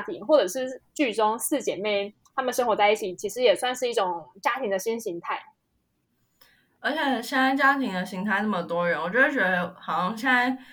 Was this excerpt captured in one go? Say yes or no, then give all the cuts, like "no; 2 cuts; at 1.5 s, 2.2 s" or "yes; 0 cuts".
yes; 0 cuts